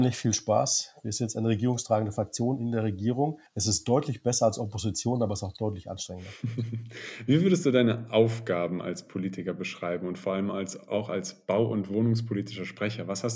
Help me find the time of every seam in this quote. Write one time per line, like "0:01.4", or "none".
0:03.5